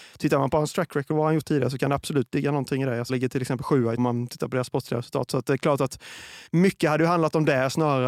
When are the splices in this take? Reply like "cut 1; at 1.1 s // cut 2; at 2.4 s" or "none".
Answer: cut 1; at 1.1 s // cut 2; at 3.1 s // cut 3; at 4.0 s // cut 4; at 6.5 s